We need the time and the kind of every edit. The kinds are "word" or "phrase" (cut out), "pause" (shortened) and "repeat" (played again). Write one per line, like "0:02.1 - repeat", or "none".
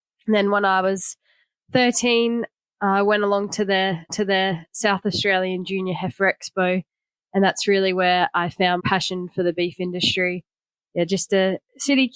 0:04.1 - repeat
0:08.8 - word